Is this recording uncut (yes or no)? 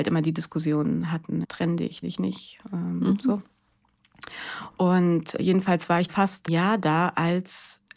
no